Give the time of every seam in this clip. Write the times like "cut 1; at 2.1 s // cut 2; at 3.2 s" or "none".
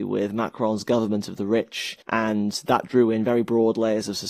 cut 1; at 2.0 s